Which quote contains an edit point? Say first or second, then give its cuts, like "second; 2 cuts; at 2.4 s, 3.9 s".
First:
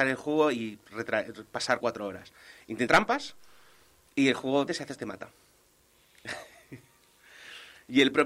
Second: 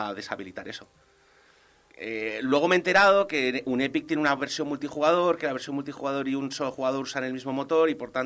first; 4 cuts; at 1.8 s, 2.9 s, 4.7 s, 5.0 s